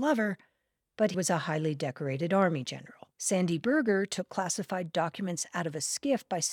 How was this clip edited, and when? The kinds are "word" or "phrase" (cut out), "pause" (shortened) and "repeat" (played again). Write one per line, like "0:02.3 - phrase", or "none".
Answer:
0:01.1 - word
0:03.1 - pause